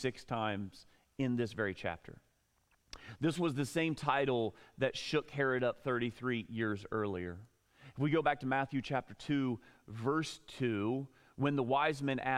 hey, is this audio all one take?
yes; 0 cuts

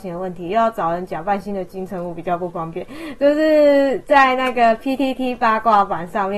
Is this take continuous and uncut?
yes; 0 cuts

